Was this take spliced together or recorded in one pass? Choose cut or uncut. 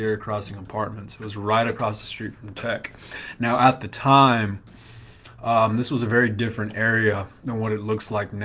uncut